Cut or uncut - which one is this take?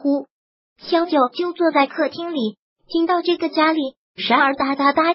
uncut